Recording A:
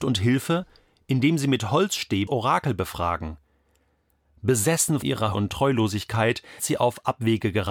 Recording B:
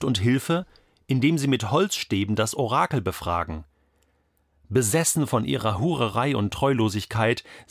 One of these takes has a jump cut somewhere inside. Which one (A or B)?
A